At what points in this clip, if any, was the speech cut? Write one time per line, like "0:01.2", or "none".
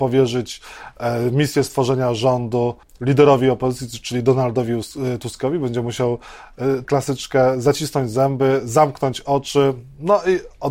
0:02.8
0:06.8